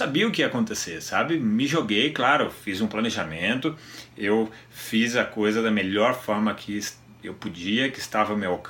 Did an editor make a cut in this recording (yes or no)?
no